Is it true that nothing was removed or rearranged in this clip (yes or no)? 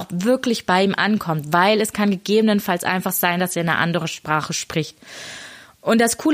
yes